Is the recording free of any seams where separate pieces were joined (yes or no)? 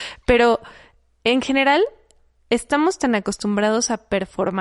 yes